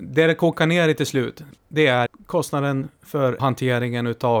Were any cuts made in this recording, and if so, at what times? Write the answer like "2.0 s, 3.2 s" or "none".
1.6 s, 2.1 s, 3.4 s